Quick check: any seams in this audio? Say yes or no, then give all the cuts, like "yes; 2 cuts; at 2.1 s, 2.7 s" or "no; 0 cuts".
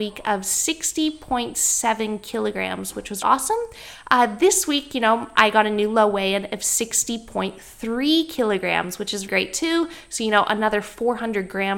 yes; 2 cuts; at 3.2 s, 9.3 s